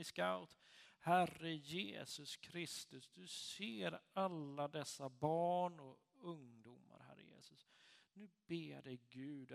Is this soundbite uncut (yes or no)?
yes